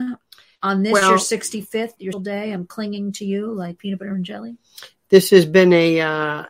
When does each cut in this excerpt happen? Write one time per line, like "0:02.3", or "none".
0:02.1
0:03.8